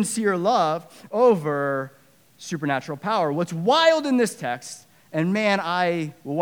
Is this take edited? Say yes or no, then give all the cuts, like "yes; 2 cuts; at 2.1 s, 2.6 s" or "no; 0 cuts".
no; 0 cuts